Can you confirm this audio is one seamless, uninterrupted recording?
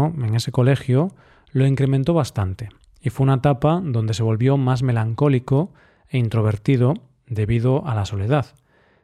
yes; 0 cuts

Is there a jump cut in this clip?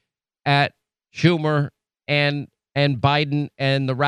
no; 0 cuts

